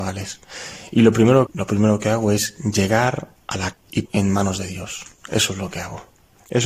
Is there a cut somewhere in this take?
yes; 3 cuts; at 1.5 s, 3.7 s, 4.0 s

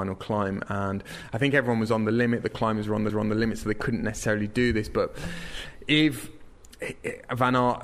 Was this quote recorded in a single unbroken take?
no; 1 cut; at 3.1 s

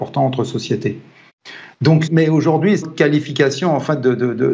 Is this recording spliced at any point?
yes; 2 cuts; at 2.1 s, 2.8 s

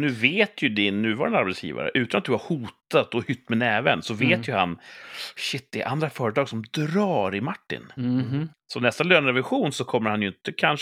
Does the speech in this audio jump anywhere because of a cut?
no; 0 cuts

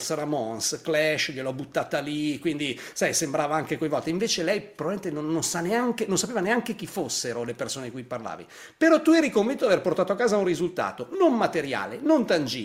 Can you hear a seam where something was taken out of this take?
no; 0 cuts

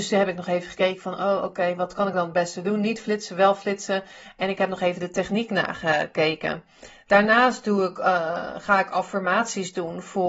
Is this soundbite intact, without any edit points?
yes; 0 cuts

